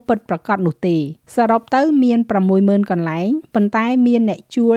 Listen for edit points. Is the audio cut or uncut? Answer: cut